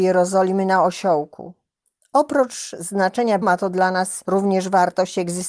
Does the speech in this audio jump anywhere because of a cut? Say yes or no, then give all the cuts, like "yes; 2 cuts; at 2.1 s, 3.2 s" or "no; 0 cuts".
yes; 1 cut; at 3.4 s